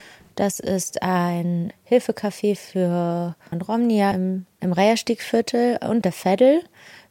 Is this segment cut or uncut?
cut